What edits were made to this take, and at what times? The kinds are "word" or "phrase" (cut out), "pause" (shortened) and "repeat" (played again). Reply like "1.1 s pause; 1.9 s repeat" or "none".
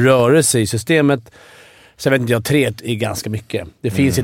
none